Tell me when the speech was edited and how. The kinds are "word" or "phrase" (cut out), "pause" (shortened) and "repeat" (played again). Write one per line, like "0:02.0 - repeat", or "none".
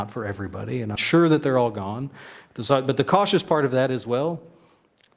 0:01.0 - word